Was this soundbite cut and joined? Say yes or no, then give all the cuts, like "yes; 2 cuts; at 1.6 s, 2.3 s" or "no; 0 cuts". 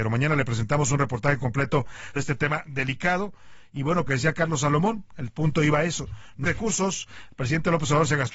yes; 3 cuts; at 2.2 s, 4.1 s, 6.4 s